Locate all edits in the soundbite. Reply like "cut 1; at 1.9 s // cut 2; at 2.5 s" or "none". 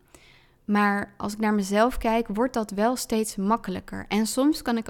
none